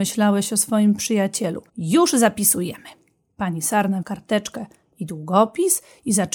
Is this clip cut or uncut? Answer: cut